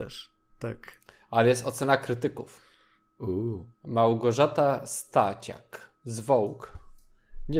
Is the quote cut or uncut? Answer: cut